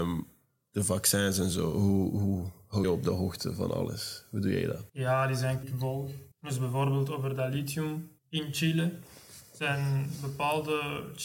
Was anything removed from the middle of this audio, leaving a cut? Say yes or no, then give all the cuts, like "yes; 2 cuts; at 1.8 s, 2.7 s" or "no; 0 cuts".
yes; 5 cuts; at 2.8 s, 4.9 s, 5.6 s, 6.3 s, 8.2 s